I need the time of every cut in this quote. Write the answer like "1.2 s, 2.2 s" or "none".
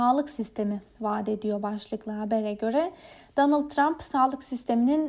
none